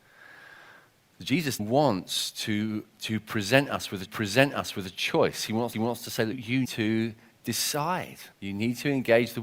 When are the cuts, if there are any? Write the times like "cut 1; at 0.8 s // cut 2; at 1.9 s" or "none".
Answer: cut 1; at 1.6 s // cut 2; at 4.1 s // cut 3; at 5.7 s // cut 4; at 6.3 s // cut 5; at 6.6 s // cut 6; at 8.3 s